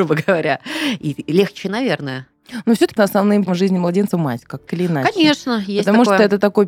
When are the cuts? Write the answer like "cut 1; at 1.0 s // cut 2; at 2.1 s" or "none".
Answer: cut 1; at 3.0 s // cut 2; at 3.5 s // cut 3; at 4.1 s // cut 4; at 4.7 s